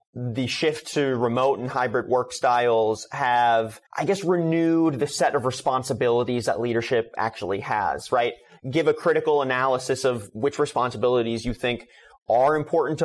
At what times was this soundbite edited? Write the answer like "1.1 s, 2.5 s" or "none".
3.9 s